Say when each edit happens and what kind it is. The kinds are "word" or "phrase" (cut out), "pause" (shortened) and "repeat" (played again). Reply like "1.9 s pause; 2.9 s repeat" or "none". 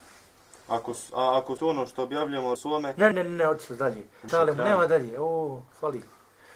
1.6 s word; 2.6 s word; 3.1 s word; 4.3 s word